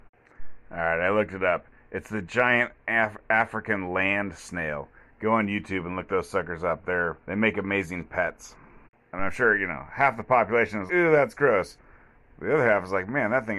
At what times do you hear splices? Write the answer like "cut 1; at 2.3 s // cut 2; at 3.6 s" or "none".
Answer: cut 1; at 7.2 s // cut 2; at 10.9 s